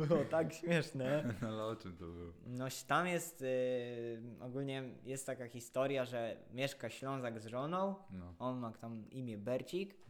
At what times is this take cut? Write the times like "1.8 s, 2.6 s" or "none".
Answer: none